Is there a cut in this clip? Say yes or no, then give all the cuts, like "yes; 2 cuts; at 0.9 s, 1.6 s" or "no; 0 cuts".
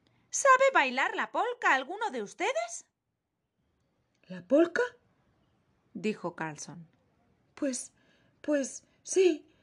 no; 0 cuts